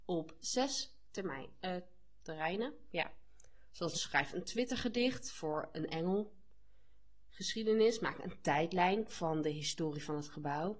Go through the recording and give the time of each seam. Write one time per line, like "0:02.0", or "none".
0:03.9